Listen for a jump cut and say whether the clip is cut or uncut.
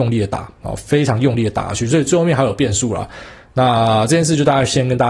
uncut